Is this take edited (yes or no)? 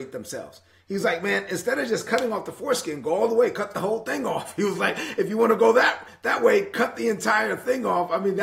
no